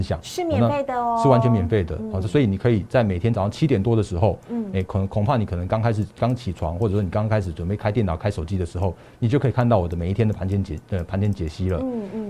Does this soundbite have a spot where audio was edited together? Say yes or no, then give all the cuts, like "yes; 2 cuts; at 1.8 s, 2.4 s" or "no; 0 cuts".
no; 0 cuts